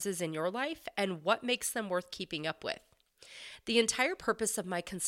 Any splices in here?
no; 0 cuts

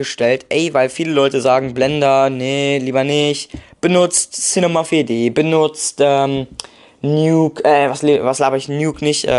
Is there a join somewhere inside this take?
no; 0 cuts

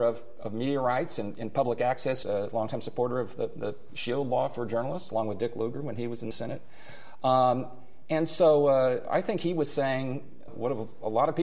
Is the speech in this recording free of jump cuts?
no; 3 cuts; at 2.2 s, 6.3 s, 10.5 s

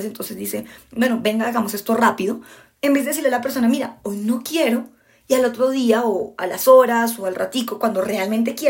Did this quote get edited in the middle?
no; 0 cuts

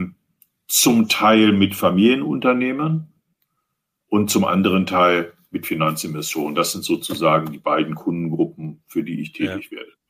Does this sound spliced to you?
no; 0 cuts

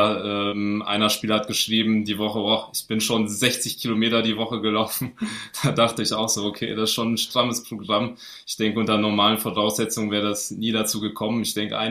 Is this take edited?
no; 0 cuts

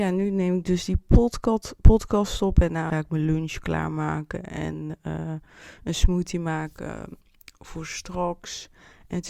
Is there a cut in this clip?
yes; 1 cut; at 2.9 s

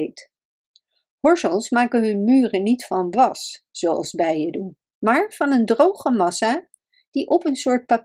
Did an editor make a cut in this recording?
no; 0 cuts

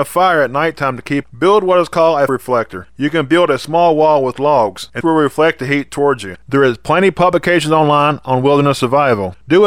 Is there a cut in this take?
yes; 3 cuts; at 1.2 s, 2.3 s, 5.0 s

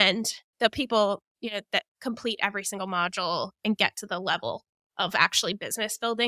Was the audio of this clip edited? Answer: no; 0 cuts

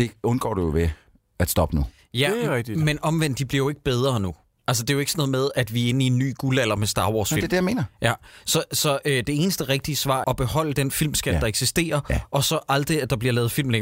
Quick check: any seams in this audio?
yes; 1 cut; at 10.2 s

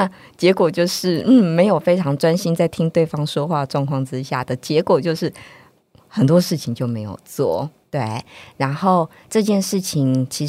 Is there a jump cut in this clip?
no; 0 cuts

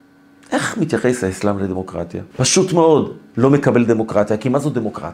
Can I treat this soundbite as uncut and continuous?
no; 2 cuts; at 2.3 s, 3.3 s

